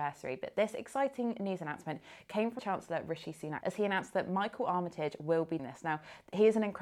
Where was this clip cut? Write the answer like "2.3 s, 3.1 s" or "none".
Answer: 2.6 s, 3.6 s, 5.6 s